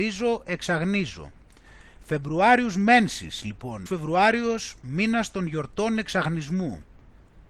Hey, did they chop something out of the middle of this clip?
yes; 1 cut; at 3.9 s

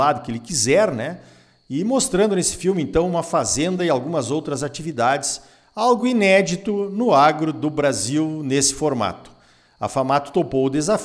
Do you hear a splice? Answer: no; 0 cuts

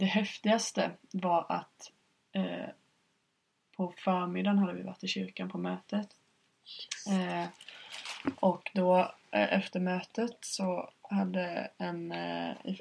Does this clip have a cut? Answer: no; 0 cuts

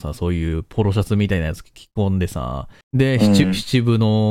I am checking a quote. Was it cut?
yes; 1 cut; at 2.8 s

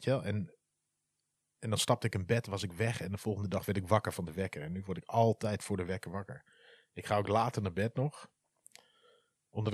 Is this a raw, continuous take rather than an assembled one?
yes; 0 cuts

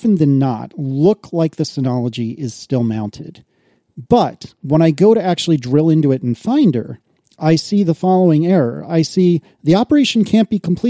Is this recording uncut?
yes; 0 cuts

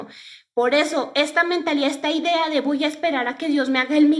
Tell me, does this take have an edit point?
no; 0 cuts

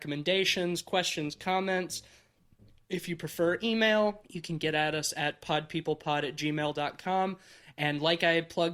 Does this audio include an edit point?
no; 0 cuts

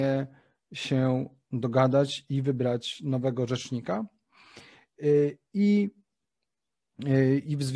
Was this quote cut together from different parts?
no; 0 cuts

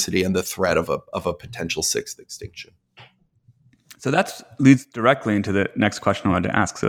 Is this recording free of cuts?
yes; 0 cuts

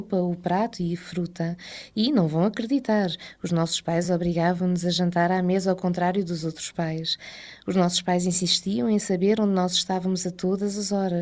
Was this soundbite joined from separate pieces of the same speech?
no; 0 cuts

